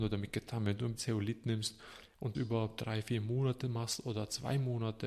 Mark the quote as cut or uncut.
cut